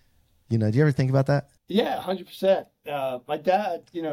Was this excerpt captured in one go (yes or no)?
no